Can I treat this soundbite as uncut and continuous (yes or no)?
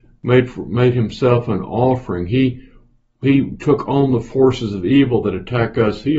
yes